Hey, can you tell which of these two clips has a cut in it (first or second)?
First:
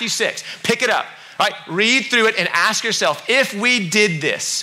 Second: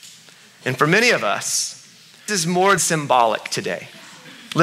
second